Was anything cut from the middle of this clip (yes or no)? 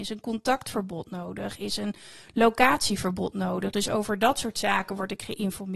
no